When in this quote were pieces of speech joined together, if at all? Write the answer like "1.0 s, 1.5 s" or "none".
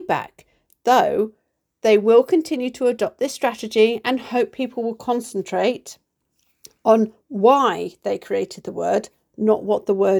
none